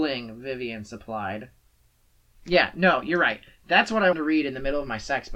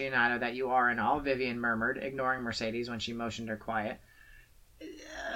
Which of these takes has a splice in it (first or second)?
first